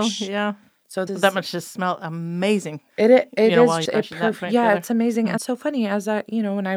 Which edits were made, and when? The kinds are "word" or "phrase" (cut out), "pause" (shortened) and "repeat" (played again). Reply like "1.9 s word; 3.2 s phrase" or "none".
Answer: 1.1 s word; 2.9 s pause; 3.8 s word; 5.4 s phrase